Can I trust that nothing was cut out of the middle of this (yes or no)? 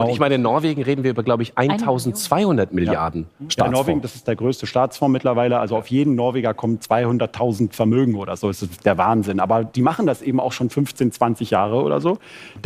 yes